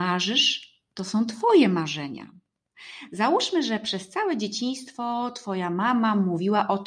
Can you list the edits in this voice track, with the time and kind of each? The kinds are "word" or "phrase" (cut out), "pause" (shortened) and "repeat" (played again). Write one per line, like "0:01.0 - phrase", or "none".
none